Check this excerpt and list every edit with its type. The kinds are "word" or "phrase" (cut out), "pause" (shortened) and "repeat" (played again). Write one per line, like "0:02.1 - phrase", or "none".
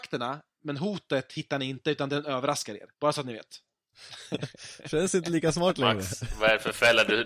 0:02.9 - pause